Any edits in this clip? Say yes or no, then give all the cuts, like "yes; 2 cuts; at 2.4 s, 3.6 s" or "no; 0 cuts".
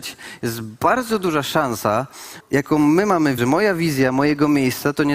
yes; 2 cuts; at 2.4 s, 3.4 s